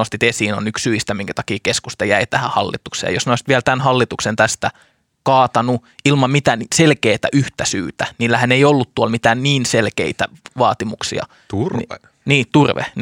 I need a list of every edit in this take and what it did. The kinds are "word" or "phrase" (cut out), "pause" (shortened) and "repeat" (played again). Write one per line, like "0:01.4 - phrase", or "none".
none